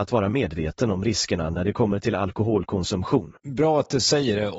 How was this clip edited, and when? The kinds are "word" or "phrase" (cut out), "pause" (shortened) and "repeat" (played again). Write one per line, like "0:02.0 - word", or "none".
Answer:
0:03.4 - pause